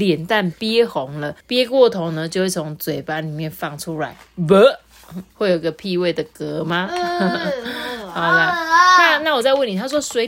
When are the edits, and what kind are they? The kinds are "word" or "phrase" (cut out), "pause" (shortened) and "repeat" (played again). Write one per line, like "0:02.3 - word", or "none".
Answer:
0:01.4 - pause
0:05.3 - pause